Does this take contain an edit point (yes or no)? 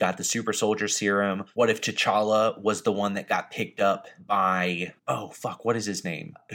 yes